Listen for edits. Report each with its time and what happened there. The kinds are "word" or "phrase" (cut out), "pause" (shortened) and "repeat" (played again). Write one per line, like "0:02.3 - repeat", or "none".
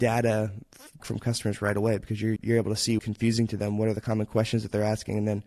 0:01.0 - word
0:02.4 - word
0:03.0 - word